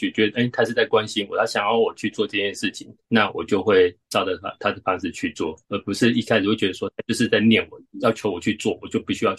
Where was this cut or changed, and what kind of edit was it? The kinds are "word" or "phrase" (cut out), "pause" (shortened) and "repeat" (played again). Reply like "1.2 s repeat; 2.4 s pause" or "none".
3.0 s pause; 4.0 s pause; 5.6 s pause